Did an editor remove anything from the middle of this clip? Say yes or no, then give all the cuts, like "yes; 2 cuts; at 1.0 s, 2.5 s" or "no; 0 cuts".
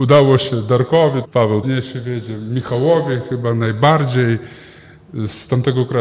yes; 2 cuts; at 1.2 s, 1.6 s